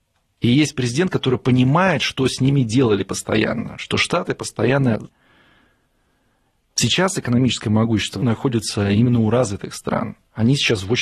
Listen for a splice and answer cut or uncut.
cut